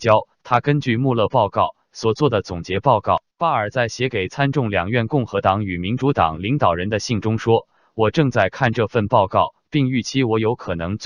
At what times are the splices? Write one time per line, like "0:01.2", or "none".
0:03.3

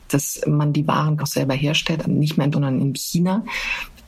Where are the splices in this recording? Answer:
0:01.2
0:02.0
0:02.5

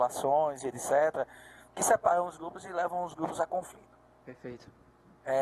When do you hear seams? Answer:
none

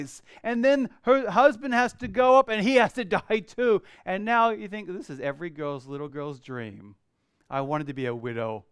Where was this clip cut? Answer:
none

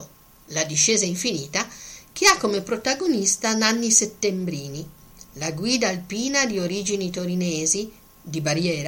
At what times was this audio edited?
none

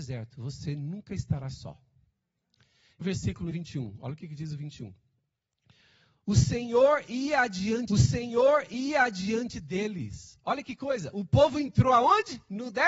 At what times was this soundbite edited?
0:03.0
0:03.5
0:07.9

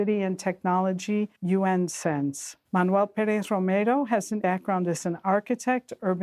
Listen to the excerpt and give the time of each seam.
0:01.4
0:02.7
0:04.4

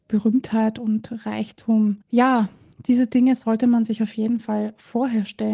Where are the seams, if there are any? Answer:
0:02.0

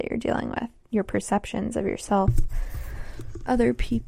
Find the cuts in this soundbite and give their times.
none

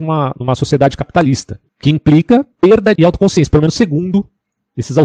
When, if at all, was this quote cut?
0:01.7
0:02.5
0:03.0

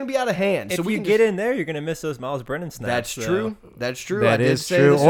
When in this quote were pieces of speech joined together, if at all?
none

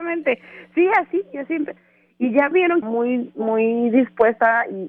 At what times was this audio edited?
0:02.5
0:02.8

